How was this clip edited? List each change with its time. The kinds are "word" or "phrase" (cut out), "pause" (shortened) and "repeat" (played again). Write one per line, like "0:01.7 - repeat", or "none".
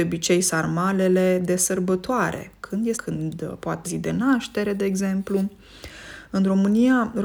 0:02.9 - word
0:03.8 - word